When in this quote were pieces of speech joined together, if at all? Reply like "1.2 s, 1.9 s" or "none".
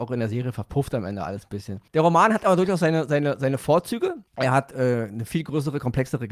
1.9 s, 4.3 s